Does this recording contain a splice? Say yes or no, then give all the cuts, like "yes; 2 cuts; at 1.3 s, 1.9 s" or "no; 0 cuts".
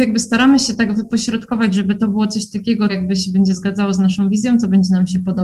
yes; 1 cut; at 2.9 s